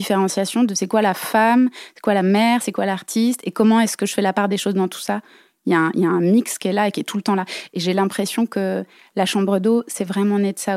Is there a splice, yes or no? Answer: no